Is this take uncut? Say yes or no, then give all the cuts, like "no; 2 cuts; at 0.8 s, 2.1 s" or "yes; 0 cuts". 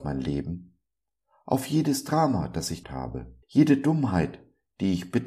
no; 2 cuts; at 2.8 s, 3.4 s